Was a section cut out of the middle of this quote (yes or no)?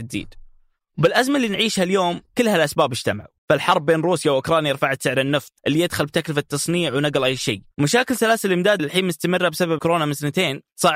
yes